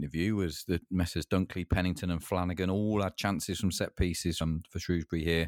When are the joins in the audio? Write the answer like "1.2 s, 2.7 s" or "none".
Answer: 4.4 s

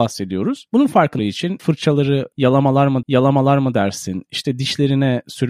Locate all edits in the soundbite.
1.2 s, 1.6 s, 3.0 s

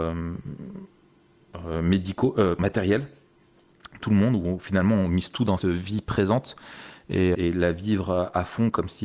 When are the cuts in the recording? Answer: 2.6 s, 4.0 s, 5.6 s, 7.3 s

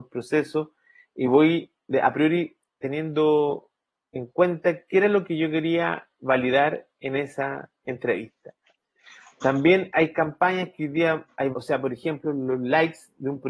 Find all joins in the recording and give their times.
11.5 s

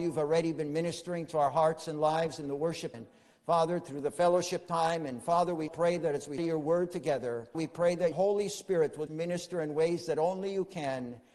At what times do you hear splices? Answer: 2.9 s, 5.7 s, 6.4 s, 7.5 s, 8.1 s, 9.1 s

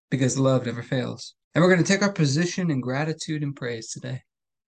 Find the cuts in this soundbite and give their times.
1.4 s

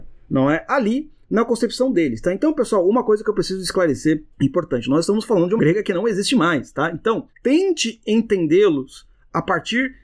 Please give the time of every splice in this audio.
4.3 s, 5.6 s, 7.3 s

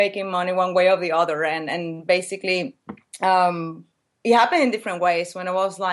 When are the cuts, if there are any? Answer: none

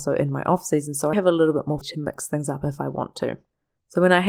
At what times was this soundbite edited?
1.1 s, 1.8 s

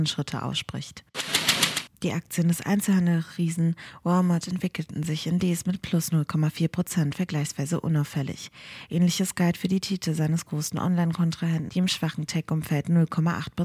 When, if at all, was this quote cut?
11.7 s

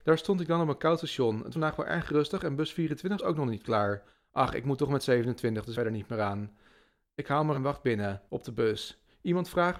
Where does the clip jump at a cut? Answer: 1.5 s, 3.2 s, 4.1 s, 5.7 s, 7.5 s, 8.3 s

